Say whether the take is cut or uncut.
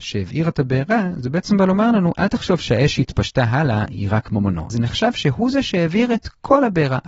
cut